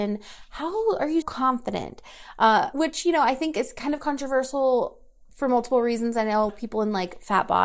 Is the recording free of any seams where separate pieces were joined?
no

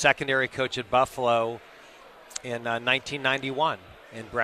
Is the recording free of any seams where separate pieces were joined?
yes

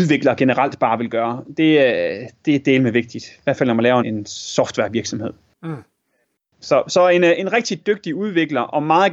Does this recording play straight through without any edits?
no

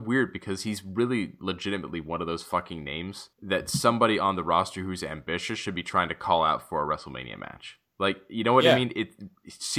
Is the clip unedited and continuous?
no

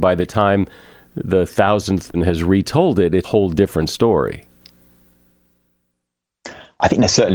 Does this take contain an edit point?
yes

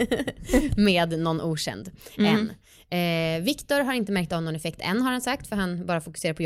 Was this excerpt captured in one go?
yes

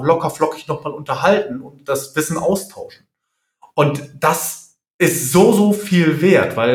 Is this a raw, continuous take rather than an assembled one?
yes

